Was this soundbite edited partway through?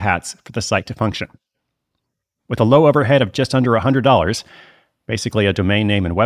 no; 0 cuts

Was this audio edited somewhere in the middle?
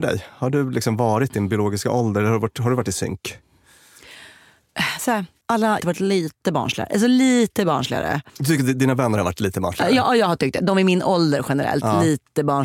yes; 2 cuts; at 5.8 s, 8.3 s

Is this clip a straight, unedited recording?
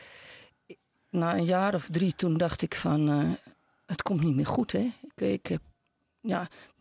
yes; 0 cuts

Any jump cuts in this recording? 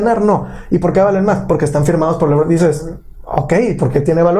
no; 0 cuts

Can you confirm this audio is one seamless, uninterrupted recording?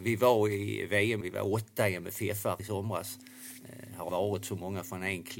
no; 3 cuts; at 1.2 s, 2.6 s, 4.1 s

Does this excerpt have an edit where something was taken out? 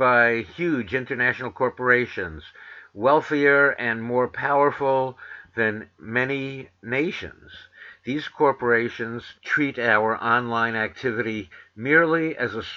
yes; 1 cut; at 9.4 s

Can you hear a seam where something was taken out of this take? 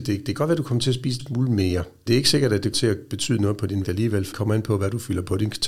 yes; 5 cuts; at 1.2 s, 2.1 s, 2.7 s, 3.8 s, 4.3 s

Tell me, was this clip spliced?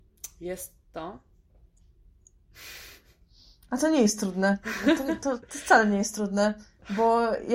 no; 0 cuts

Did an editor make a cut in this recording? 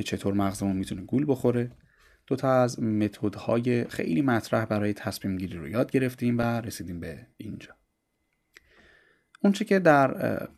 no; 0 cuts

